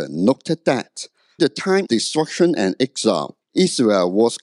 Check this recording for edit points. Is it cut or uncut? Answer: cut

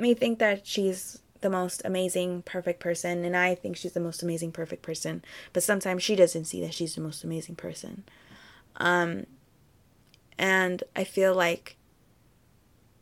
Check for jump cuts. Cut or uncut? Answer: cut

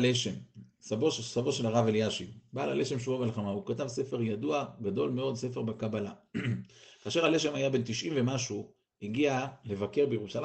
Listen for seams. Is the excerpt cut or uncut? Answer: uncut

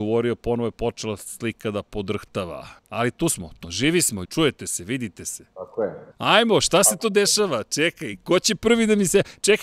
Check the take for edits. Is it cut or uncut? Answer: cut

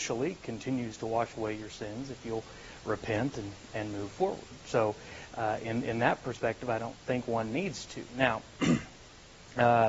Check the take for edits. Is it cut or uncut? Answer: uncut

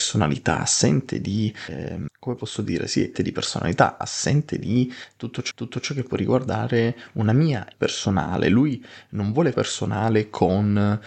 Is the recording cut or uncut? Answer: cut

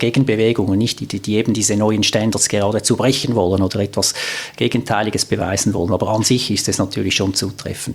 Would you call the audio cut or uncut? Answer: uncut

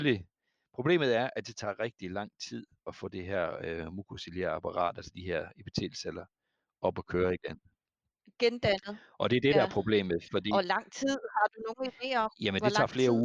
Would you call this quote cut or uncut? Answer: uncut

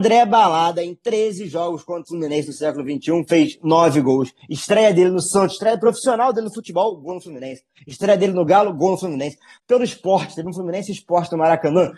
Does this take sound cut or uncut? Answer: uncut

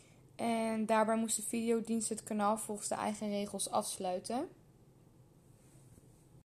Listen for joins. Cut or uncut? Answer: uncut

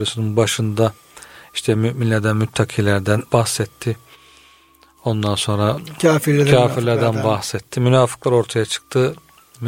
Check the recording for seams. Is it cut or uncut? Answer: uncut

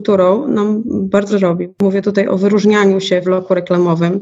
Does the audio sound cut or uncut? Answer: cut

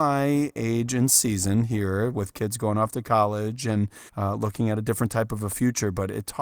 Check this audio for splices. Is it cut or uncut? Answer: cut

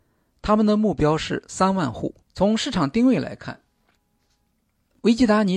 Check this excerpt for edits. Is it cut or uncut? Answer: cut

